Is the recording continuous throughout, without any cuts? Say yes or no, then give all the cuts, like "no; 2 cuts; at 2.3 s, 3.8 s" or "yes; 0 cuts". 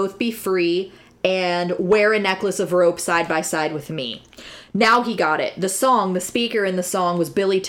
yes; 0 cuts